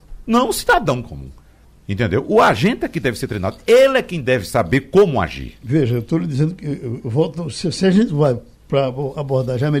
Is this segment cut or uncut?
cut